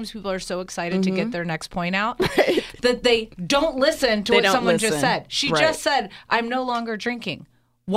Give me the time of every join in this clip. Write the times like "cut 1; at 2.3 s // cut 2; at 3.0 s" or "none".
none